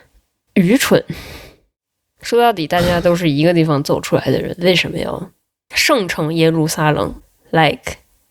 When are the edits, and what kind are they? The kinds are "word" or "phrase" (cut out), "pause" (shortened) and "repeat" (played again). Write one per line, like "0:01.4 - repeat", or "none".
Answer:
none